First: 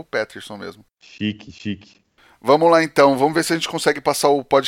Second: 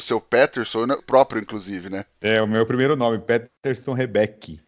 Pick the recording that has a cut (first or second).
second